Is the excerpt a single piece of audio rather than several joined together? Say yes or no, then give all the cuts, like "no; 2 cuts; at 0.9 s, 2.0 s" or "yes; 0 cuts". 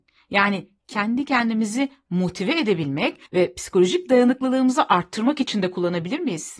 no; 1 cut; at 3.3 s